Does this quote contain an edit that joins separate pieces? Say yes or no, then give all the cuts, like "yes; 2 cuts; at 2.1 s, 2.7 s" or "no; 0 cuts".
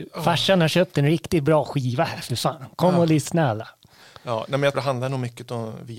yes; 1 cut; at 4.7 s